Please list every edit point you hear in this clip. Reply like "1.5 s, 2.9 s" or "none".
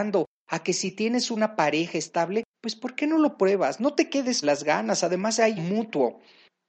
2.5 s, 4.4 s, 5.6 s